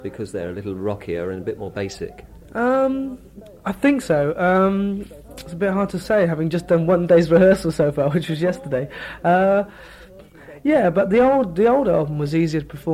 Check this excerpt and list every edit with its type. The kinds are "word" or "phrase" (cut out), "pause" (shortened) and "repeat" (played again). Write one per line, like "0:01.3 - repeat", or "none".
none